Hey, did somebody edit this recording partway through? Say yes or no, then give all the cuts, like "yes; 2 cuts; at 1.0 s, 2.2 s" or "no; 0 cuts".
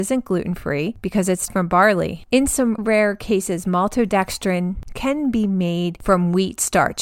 yes; 2 cuts; at 1.5 s, 2.8 s